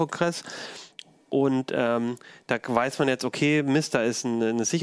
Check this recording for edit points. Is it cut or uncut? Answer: uncut